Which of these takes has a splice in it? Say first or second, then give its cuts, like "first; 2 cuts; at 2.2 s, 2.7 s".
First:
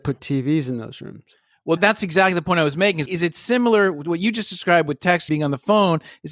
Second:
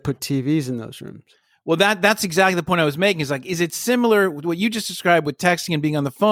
first; 3 cuts; at 1.8 s, 3.1 s, 5.3 s